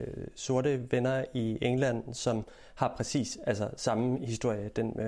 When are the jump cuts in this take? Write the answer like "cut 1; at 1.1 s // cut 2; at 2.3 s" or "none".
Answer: none